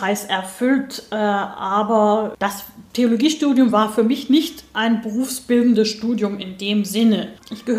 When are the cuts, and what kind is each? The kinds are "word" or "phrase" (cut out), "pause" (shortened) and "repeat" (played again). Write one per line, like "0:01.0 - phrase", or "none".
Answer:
none